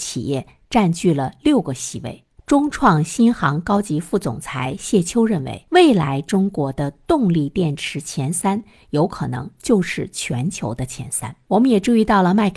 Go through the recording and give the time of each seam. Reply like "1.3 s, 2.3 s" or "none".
none